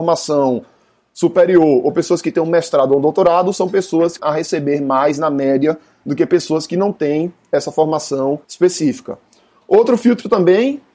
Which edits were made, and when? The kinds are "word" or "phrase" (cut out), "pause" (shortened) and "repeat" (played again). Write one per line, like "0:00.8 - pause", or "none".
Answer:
0:04.2 - word
0:08.4 - pause